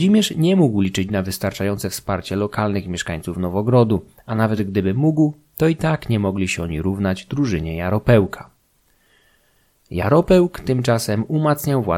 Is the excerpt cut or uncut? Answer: uncut